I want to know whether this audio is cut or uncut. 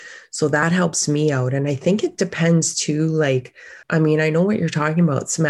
cut